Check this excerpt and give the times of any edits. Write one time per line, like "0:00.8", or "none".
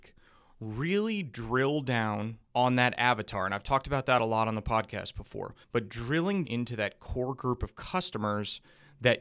0:02.4
0:05.6
0:06.4

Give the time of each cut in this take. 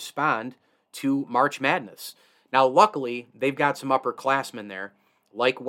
none

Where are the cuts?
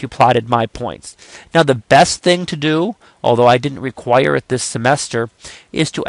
none

